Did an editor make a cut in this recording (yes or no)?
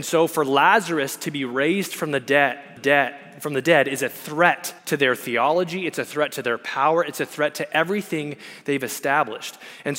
yes